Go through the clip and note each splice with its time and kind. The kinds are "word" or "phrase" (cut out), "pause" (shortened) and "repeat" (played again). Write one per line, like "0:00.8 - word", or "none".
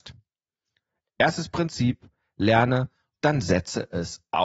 0:03.2 - word